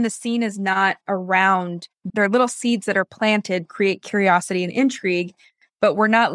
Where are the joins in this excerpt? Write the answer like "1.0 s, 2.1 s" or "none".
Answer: 2.1 s, 3.7 s